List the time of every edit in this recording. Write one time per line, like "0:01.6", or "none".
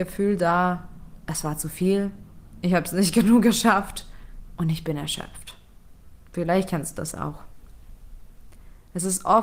none